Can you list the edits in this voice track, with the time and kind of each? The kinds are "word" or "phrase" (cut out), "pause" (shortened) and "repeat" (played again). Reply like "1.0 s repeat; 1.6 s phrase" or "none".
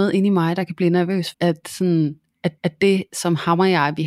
1.3 s word; 2.6 s repeat